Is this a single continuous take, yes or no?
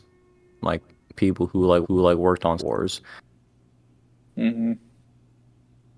no